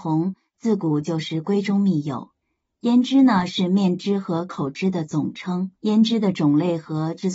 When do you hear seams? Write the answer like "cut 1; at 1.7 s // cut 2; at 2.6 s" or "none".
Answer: cut 1; at 2.4 s // cut 2; at 5.8 s